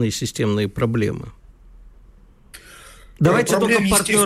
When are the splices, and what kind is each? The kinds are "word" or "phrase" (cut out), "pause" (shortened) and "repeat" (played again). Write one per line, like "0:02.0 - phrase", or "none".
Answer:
none